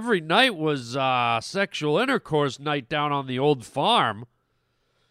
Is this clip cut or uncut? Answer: uncut